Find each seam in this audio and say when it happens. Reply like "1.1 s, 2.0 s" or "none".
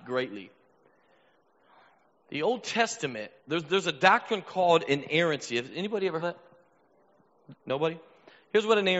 3.4 s, 6.2 s, 7.6 s